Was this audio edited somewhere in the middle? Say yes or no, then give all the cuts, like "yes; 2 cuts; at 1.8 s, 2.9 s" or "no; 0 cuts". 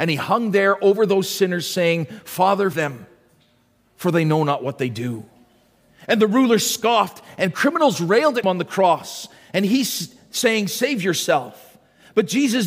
yes; 2 cuts; at 2.7 s, 8.4 s